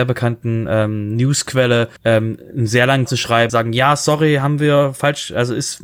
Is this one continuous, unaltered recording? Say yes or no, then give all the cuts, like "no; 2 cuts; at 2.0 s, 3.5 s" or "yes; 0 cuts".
no; 3 cuts; at 2.0 s, 3.1 s, 3.5 s